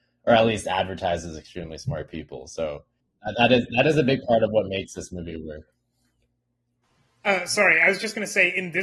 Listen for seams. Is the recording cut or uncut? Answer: uncut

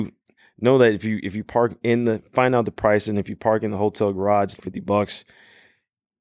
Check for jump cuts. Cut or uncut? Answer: cut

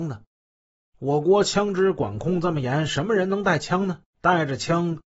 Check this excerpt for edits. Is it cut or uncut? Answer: cut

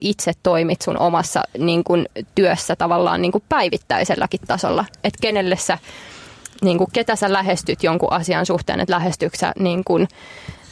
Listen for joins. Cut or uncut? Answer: uncut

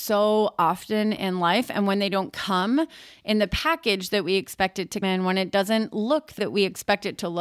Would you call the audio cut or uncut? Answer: cut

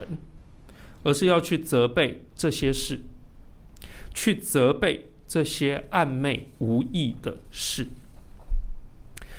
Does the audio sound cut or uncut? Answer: cut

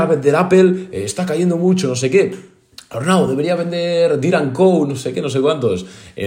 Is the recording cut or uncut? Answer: uncut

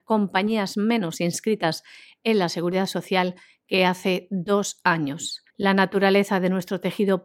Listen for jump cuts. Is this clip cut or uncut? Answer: cut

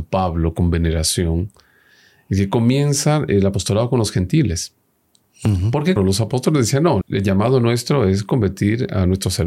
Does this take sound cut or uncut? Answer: cut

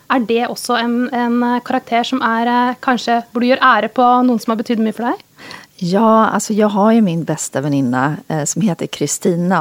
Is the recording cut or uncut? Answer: uncut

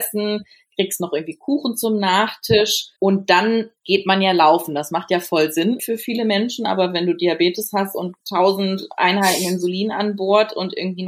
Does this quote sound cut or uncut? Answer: cut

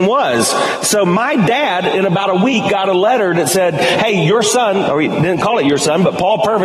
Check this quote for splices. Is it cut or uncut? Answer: uncut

